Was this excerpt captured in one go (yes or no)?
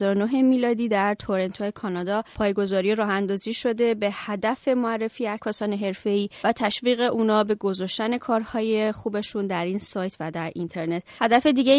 yes